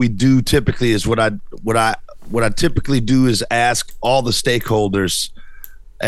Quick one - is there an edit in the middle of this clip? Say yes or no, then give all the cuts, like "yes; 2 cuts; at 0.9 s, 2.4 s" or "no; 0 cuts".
no; 0 cuts